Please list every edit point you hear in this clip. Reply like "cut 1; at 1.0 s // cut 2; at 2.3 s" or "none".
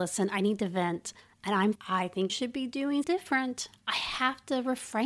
cut 1; at 1.8 s // cut 2; at 2.3 s // cut 3; at 3.0 s